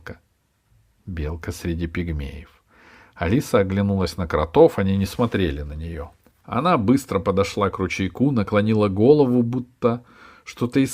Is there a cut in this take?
no; 0 cuts

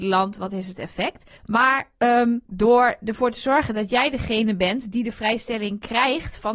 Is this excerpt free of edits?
no; 2 cuts; at 1.4 s, 2.4 s

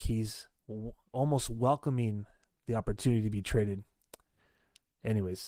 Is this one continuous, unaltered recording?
yes; 0 cuts

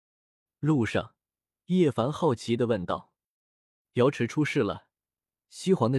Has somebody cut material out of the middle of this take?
no; 0 cuts

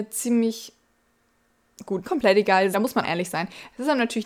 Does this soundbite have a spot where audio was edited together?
yes; 3 cuts; at 2.0 s, 2.7 s, 3.0 s

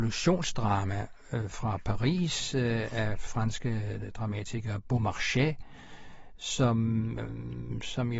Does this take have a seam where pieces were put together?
yes; 1 cut; at 3.3 s

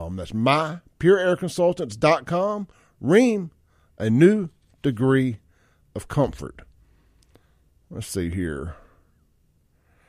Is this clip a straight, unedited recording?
yes; 0 cuts

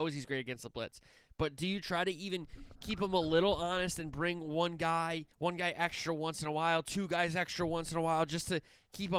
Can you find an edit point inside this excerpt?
yes; 1 cut; at 5.3 s

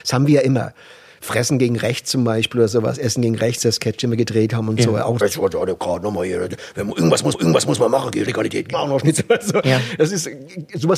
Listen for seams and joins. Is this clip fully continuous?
no; 4 cuts; at 5.2 s, 7.3 s, 8.3 s, 8.7 s

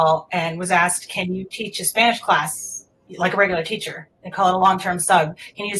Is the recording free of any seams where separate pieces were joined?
yes; 0 cuts

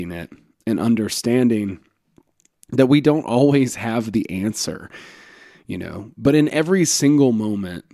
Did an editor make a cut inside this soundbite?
no; 0 cuts

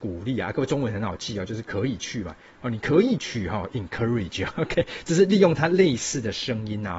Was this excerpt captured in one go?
yes; 0 cuts

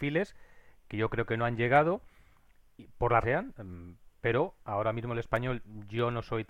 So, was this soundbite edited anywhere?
yes; 1 cut; at 3.2 s

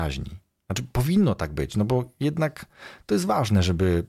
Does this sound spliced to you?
no; 0 cuts

